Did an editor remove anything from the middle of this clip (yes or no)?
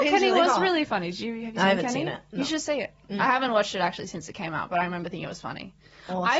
no